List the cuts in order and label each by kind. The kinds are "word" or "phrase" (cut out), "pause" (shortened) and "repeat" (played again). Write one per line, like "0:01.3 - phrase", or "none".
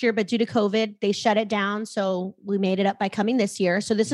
none